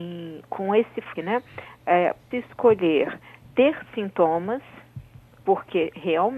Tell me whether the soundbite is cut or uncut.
cut